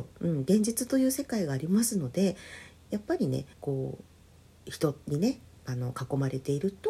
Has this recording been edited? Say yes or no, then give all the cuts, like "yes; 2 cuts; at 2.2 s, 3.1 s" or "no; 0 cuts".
yes; 1 cut; at 3.5 s